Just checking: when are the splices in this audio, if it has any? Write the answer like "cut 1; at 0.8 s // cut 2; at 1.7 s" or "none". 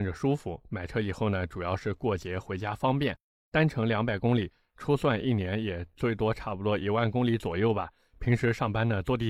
none